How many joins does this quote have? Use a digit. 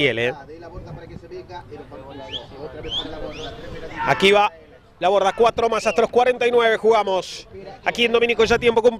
0